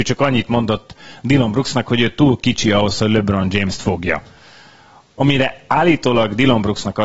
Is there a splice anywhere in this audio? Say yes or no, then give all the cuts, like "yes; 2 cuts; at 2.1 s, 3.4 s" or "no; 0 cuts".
no; 0 cuts